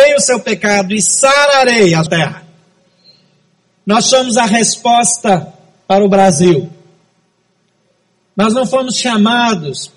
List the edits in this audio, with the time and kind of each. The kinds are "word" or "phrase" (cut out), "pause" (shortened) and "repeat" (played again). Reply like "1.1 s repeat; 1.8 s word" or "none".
2.1 s word

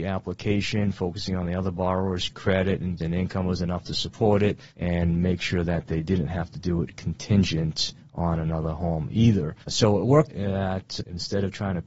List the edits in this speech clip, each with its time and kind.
3.0 s word; 4.7 s pause; 9.6 s pause; 10.3 s word

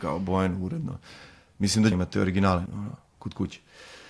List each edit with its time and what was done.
1.9 s word; 2.7 s word

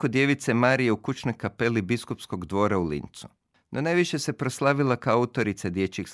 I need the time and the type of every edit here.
none

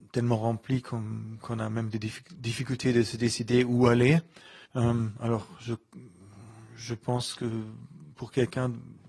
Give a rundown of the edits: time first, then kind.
4.7 s pause

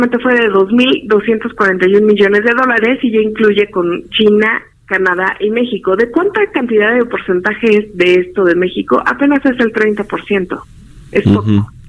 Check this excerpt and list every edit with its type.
none

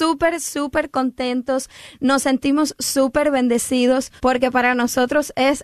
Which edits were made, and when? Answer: 4.2 s pause

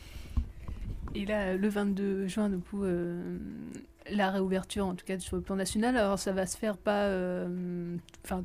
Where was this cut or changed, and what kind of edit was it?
6.7 s word

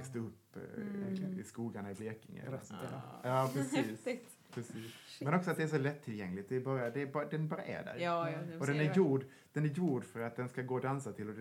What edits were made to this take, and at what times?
none

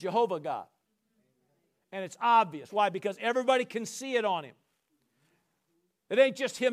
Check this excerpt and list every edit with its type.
none

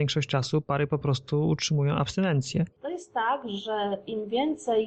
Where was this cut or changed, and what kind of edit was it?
2.7 s pause

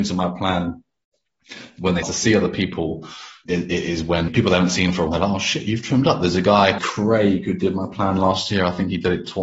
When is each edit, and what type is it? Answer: 2.0 s word; 3.5 s word; 4.3 s word; 5.1 s word; 6.8 s word

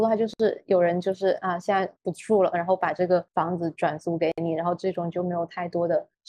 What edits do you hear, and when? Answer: 2.0 s pause

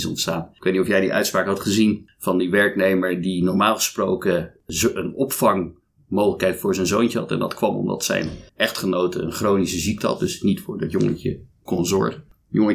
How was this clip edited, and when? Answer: 8.5 s pause

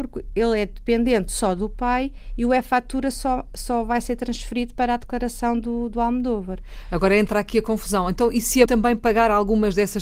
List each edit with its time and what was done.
8.7 s word

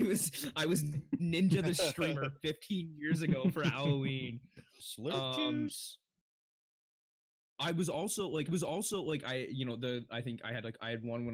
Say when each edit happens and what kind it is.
8.5 s repeat

